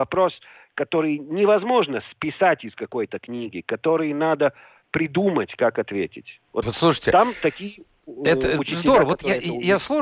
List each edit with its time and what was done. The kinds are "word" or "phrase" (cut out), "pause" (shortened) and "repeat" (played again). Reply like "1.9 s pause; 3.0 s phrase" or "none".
none